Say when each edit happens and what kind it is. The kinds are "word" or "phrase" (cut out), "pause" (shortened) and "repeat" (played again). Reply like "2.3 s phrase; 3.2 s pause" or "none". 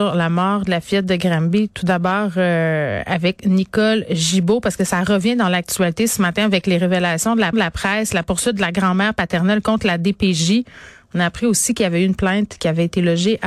7.5 s repeat